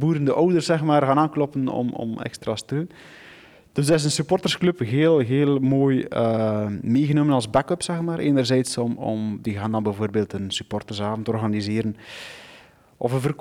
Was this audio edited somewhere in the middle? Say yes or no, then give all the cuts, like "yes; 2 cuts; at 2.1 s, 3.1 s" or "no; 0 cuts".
no; 0 cuts